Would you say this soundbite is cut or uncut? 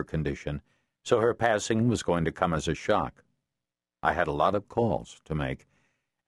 uncut